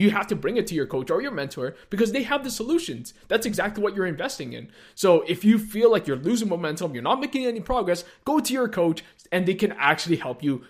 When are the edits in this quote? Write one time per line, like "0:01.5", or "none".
none